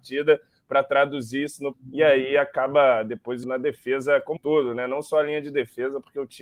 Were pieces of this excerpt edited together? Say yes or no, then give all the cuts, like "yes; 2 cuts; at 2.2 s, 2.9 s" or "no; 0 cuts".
yes; 3 cuts; at 1.7 s, 3.4 s, 4.4 s